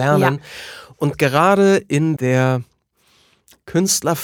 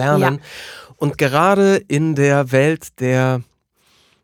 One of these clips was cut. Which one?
first; 1 cut; at 2.2 s

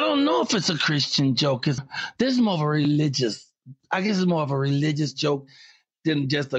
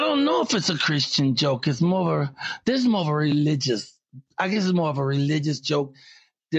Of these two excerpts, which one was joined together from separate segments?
first; 1 cut; at 1.8 s

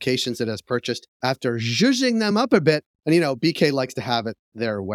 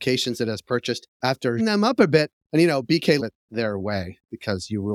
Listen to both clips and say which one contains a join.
second; 2 cuts; at 1.6 s, 3.2 s

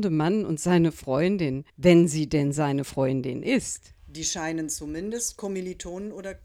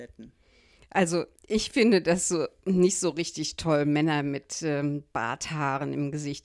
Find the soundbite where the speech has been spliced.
first; 2 cuts; at 1.7 s, 4.0 s

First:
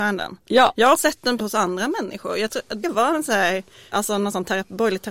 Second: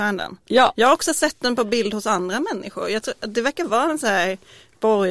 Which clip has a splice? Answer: first; 4 cuts; at 1.0 s, 1.4 s, 2.8 s, 3.9 s

